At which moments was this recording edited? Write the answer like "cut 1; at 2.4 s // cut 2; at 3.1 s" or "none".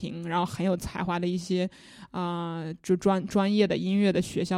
cut 1; at 2.8 s